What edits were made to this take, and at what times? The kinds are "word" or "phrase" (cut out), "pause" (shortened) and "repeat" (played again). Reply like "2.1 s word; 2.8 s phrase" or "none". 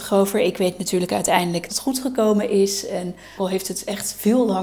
1.7 s word; 3.4 s word